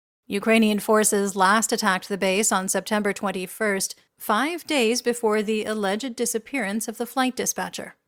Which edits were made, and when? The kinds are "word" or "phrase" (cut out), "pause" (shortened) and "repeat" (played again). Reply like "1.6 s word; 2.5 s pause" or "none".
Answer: 4.1 s pause